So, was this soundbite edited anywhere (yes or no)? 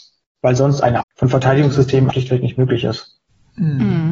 yes